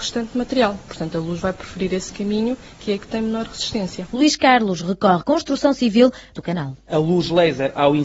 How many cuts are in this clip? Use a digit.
3